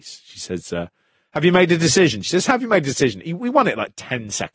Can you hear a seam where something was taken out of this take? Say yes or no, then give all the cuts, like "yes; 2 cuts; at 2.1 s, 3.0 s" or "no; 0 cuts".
no; 0 cuts